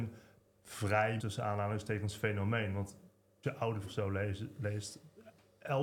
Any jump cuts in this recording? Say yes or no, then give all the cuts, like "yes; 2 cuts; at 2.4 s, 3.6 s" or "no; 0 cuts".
yes; 3 cuts; at 1.2 s, 3.4 s, 3.8 s